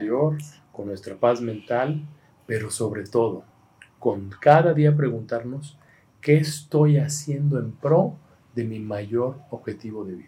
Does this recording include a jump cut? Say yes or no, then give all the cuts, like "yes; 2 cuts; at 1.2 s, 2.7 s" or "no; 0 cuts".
no; 0 cuts